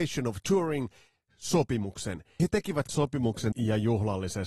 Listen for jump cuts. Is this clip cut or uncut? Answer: cut